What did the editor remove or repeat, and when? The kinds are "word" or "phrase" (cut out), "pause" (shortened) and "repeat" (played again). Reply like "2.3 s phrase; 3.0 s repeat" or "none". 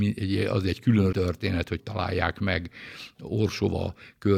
1.1 s word; 1.8 s word